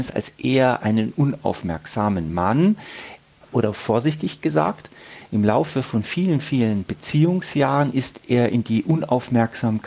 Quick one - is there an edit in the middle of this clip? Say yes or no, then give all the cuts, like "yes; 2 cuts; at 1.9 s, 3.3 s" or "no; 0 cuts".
no; 0 cuts